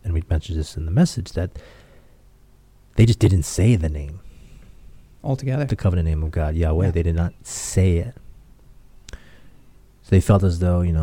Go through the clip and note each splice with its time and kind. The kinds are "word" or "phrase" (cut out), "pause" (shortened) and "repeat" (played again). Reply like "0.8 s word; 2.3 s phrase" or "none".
none

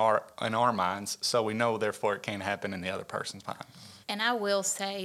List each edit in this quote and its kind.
4.0 s pause

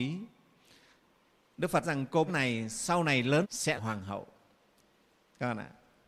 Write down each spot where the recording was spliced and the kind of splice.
1.8 s word; 2.3 s word; 3.4 s word; 3.8 s word

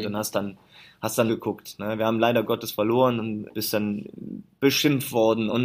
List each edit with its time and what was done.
1.3 s word; 3.5 s word

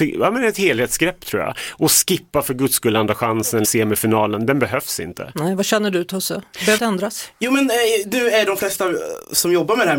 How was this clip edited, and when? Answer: 3.6 s word; 6.8 s word

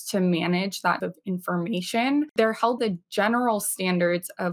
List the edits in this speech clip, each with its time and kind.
1.0 s word; 2.8 s word

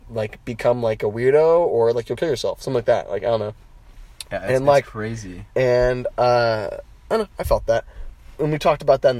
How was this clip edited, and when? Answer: none

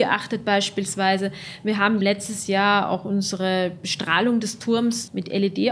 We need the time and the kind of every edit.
none

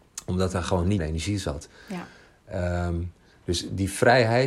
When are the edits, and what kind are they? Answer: 1.0 s word

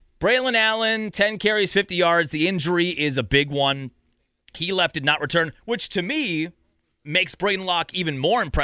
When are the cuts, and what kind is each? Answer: none

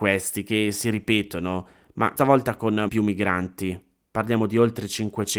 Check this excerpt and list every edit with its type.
2.2 s word; 2.9 s word

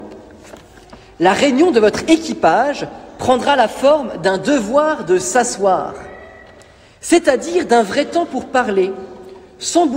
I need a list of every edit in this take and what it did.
none

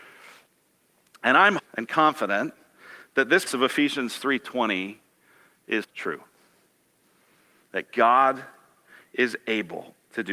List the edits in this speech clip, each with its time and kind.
1.6 s word; 3.5 s word; 5.8 s word

